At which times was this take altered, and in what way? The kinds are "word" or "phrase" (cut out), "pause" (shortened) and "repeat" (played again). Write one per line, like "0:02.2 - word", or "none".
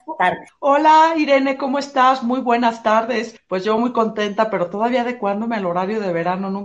none